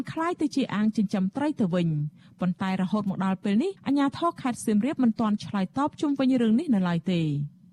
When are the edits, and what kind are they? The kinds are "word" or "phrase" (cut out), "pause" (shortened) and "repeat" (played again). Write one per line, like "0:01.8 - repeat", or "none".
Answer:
0:03.8 - pause